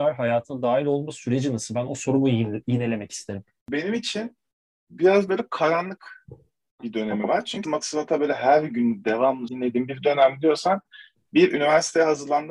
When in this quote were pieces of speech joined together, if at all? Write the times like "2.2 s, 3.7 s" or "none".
7.6 s, 9.5 s